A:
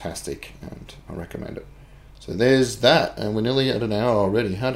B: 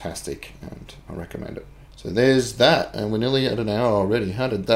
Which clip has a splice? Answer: B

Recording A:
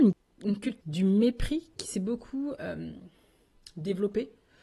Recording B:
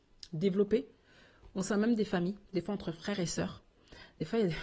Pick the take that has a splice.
B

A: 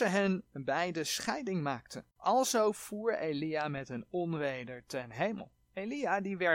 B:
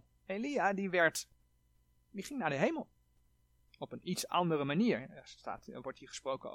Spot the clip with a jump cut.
A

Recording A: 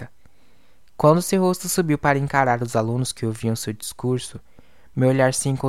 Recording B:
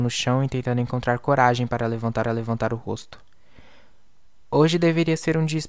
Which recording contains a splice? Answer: B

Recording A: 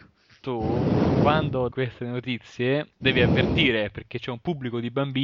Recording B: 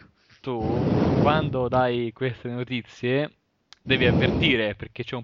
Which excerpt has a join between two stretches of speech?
A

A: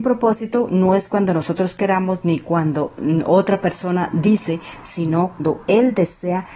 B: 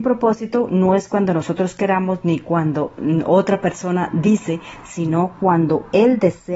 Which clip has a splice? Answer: A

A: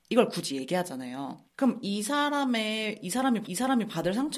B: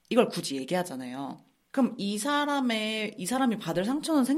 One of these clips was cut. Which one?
A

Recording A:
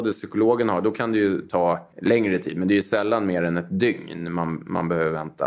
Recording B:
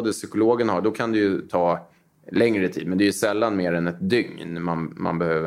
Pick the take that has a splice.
A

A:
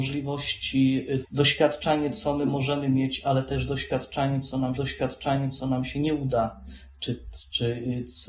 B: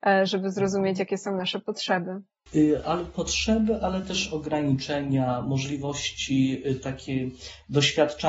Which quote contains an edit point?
A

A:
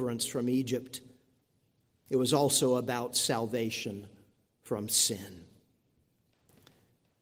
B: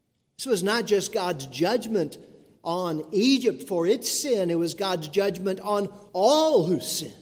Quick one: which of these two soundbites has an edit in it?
B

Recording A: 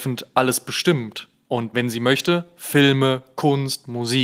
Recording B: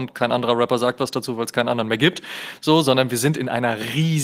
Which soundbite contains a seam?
A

